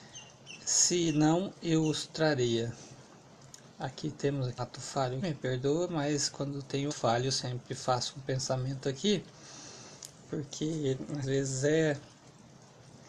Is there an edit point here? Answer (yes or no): yes